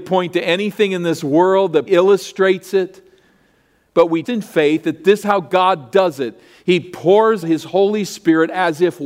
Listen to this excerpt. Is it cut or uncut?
cut